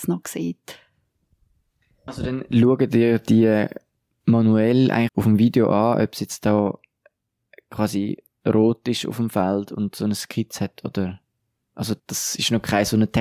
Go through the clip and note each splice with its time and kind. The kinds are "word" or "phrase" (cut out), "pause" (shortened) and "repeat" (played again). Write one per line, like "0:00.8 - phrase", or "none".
0:05.1 - word
0:12.0 - pause